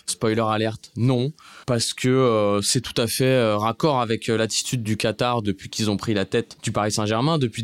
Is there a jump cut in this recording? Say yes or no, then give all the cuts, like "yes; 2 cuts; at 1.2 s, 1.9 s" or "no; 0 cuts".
yes; 1 cut; at 1.6 s